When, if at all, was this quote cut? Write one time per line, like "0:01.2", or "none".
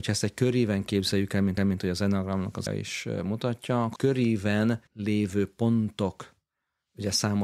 0:01.6
0:02.7
0:04.0
0:04.9